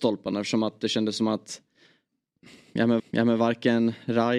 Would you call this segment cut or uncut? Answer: cut